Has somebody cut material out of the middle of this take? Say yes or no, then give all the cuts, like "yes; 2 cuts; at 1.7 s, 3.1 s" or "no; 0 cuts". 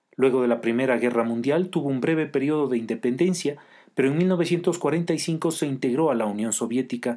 no; 0 cuts